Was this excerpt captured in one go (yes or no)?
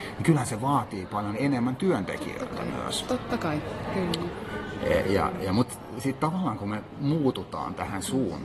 yes